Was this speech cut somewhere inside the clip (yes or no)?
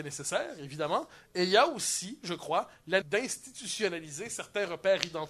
yes